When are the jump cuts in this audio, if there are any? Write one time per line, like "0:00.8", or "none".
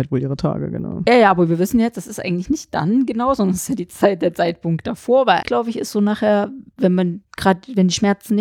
0:05.4